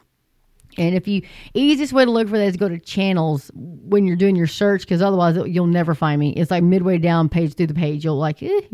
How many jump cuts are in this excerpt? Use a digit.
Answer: 1